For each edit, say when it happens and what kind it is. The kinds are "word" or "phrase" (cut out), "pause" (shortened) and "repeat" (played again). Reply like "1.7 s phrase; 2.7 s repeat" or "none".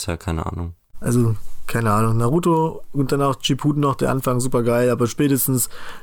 none